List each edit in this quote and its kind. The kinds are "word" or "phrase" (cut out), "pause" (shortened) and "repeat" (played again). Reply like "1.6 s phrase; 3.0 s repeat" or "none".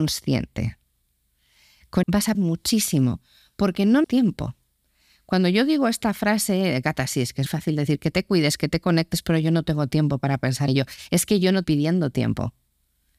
2.0 s word; 2.3 s word; 4.0 s word; 7.5 s word; 10.7 s word; 11.6 s word

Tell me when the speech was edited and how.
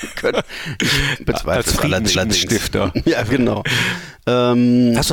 2.1 s repeat

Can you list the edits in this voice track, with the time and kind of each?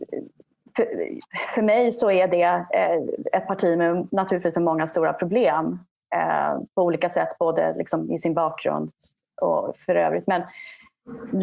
none

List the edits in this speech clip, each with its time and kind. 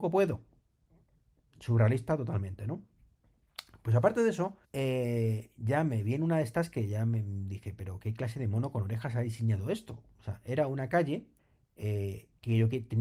4.6 s pause; 11.4 s pause

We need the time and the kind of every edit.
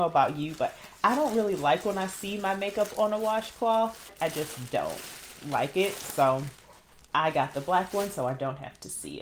none

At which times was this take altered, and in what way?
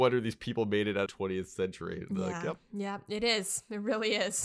1.1 s phrase

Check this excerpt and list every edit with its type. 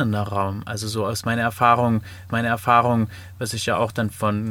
2.3 s repeat

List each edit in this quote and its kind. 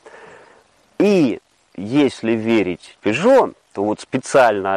2.9 s word

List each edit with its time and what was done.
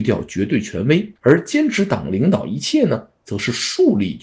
1.2 s pause

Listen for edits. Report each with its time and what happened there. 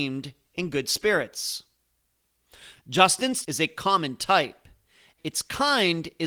3.4 s word; 5.2 s word

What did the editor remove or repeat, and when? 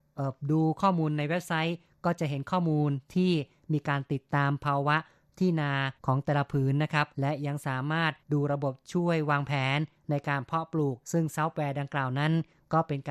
6.0 s pause; 7.1 s pause; 8.2 s pause; 11.0 s pause

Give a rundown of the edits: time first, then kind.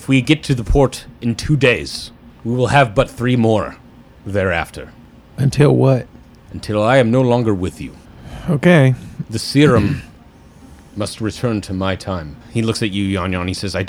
12.4 s pause

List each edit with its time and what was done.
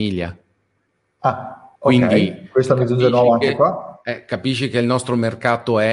1.8 s pause

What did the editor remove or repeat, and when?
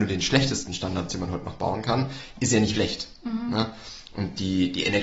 1.1 s word; 2.7 s word

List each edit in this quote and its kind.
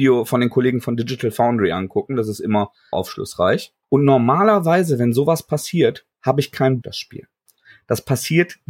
2.9 s word; 3.8 s pause; 6.1 s pause; 6.8 s phrase

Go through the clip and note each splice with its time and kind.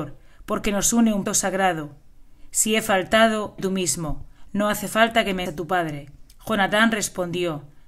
1.3 s word; 3.6 s word; 5.5 s word; 6.3 s pause

